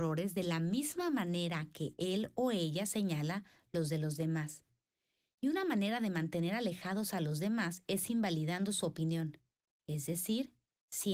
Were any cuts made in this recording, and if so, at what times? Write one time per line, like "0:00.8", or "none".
none